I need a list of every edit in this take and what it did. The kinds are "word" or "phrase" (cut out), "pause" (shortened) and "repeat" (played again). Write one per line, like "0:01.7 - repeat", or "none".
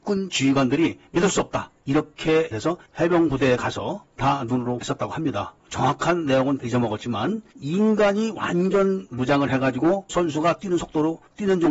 0:02.5 - word
0:04.8 - word
0:06.6 - word
0:10.1 - word